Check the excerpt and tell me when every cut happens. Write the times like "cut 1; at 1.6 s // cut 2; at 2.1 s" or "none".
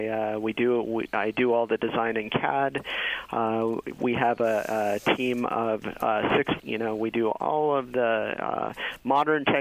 cut 1; at 6.6 s